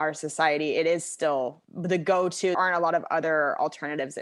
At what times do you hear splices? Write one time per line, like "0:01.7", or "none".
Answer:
0:01.6
0:02.5